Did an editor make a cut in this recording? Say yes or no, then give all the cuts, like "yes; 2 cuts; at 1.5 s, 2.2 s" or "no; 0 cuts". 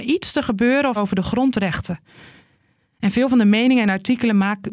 yes; 1 cut; at 1.0 s